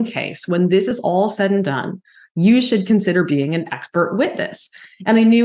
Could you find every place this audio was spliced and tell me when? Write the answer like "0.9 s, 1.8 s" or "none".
none